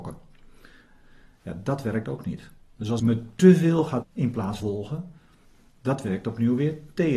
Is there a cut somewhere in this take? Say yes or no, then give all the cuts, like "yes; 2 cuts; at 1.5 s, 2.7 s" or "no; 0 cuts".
yes; 3 cuts; at 3.0 s, 4.0 s, 4.6 s